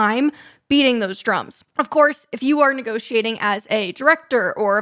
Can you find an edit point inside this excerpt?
yes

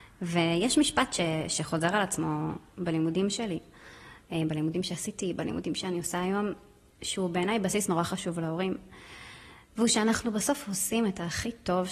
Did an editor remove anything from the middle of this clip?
no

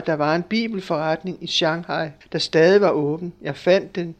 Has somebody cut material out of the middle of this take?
yes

